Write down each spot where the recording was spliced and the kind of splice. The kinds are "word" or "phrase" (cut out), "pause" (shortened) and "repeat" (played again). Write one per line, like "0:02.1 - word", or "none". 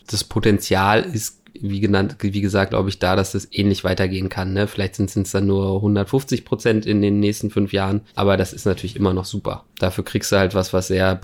0:02.7 - word
0:05.1 - repeat
0:08.1 - pause